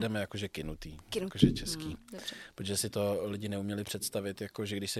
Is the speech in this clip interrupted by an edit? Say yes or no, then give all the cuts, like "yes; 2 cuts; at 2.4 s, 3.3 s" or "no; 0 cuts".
no; 0 cuts